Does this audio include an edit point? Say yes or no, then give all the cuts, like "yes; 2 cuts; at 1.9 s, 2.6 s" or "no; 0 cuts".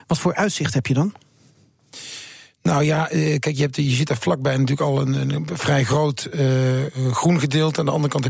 no; 0 cuts